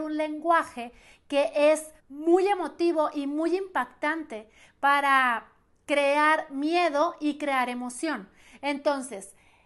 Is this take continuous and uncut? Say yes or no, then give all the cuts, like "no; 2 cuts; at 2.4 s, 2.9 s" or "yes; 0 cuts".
no; 1 cut; at 2.0 s